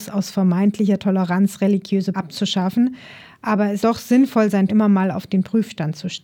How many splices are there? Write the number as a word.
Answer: three